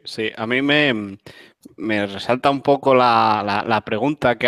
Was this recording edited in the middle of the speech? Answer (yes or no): no